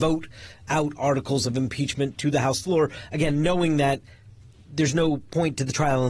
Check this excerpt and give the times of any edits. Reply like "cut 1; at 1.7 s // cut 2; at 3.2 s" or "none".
none

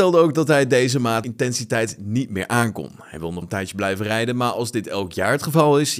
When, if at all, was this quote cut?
cut 1; at 1.2 s // cut 2; at 3.4 s

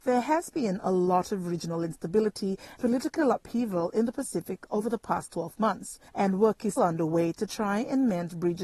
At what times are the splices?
cut 1; at 2.8 s // cut 2; at 6.1 s // cut 3; at 6.8 s

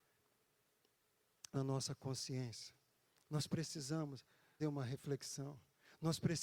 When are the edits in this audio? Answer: cut 1; at 1.5 s // cut 2; at 4.6 s

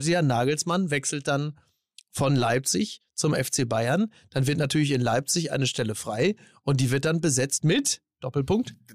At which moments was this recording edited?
none

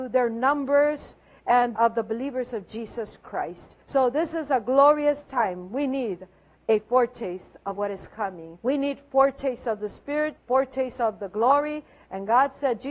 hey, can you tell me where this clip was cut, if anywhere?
cut 1; at 1.8 s // cut 2; at 3.8 s // cut 3; at 8.6 s // cut 4; at 10.4 s

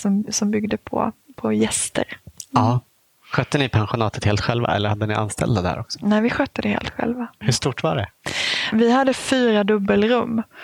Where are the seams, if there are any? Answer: none

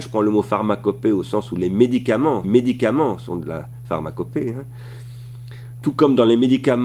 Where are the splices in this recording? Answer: cut 1; at 2.4 s

